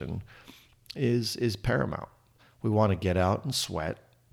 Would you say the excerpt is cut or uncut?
uncut